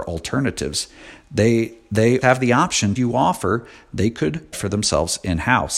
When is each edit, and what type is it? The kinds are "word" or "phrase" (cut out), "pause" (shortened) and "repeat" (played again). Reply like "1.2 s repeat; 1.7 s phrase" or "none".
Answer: 2.2 s word; 3.0 s phrase; 4.5 s phrase